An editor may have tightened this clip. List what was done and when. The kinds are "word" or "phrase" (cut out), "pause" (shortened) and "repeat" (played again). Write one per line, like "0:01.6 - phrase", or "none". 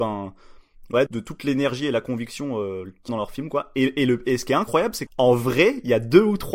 0:01.1 - word
0:03.1 - word
0:05.1 - word